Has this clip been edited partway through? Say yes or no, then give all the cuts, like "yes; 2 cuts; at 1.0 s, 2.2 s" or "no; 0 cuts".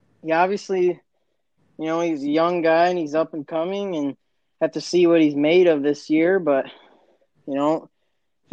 no; 0 cuts